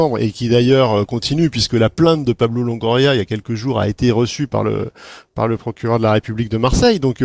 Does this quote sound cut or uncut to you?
uncut